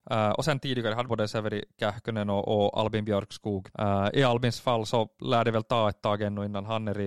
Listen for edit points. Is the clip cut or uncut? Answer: cut